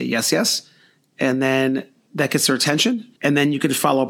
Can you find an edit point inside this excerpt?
yes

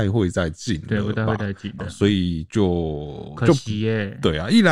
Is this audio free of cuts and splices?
no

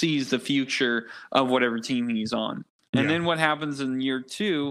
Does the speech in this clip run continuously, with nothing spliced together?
yes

